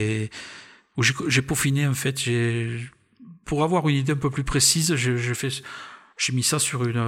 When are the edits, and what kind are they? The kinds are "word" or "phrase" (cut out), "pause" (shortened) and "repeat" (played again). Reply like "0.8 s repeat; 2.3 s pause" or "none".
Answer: none